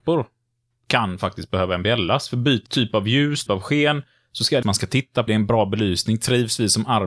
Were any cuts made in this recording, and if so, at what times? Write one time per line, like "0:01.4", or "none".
0:02.7
0:03.5
0:04.6
0:05.3